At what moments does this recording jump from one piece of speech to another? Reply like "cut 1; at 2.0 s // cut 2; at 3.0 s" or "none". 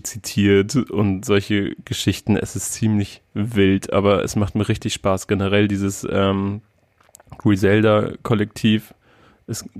none